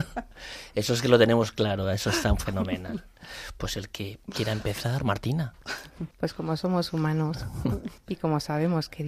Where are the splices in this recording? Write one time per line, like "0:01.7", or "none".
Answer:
0:04.2
0:06.1
0:08.0

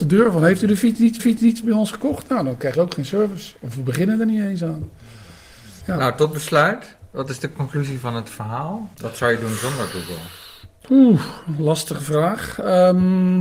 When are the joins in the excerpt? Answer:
0:01.2
0:02.7
0:08.9

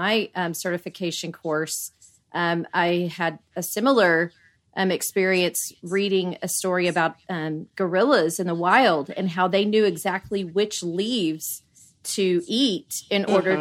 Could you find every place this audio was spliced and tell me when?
none

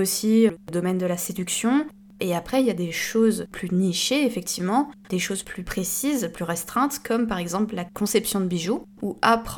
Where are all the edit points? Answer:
none

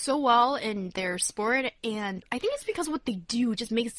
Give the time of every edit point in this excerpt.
none

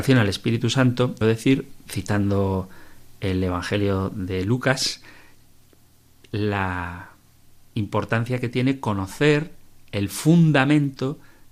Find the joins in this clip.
0:01.2

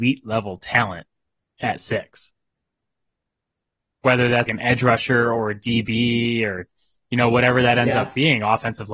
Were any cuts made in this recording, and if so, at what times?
0:04.5

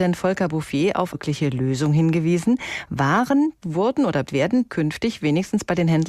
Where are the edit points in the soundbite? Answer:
0:01.1
0:03.6
0:04.3
0:04.7

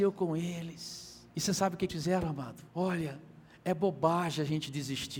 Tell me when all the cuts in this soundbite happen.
0:01.3
0:01.9
0:02.7

